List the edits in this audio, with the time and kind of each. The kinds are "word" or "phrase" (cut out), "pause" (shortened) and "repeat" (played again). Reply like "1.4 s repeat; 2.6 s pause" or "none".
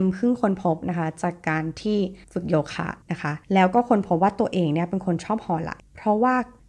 2.2 s pause; 3.0 s pause; 3.4 s pause